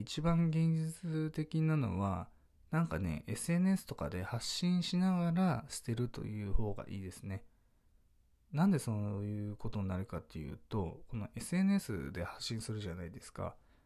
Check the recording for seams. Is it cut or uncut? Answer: uncut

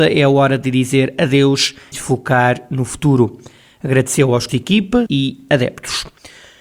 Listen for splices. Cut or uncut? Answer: cut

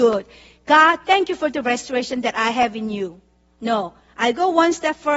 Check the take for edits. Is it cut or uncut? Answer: uncut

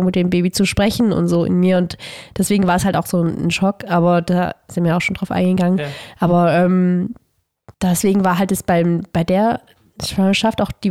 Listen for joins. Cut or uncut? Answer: cut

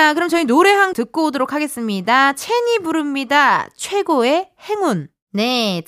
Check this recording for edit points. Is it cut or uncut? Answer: cut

